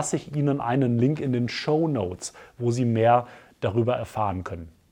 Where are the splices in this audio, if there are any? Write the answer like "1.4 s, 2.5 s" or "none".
none